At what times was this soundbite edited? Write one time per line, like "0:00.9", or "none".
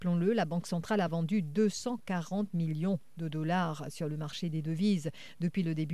none